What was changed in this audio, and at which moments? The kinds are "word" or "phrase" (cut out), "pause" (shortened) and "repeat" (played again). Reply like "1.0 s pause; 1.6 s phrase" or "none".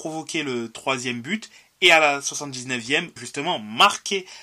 3.2 s word